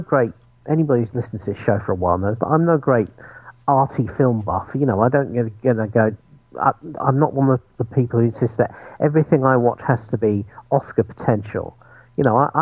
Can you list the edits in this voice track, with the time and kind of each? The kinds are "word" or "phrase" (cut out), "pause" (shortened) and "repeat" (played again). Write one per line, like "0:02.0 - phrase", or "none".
none